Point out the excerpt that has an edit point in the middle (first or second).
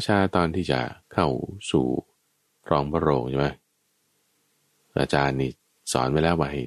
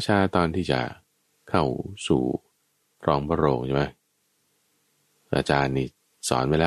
first